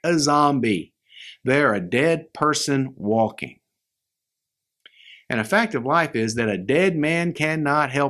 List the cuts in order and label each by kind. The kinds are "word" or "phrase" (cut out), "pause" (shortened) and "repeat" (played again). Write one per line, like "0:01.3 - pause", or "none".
none